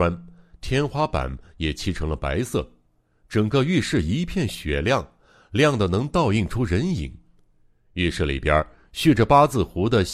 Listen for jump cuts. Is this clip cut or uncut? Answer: uncut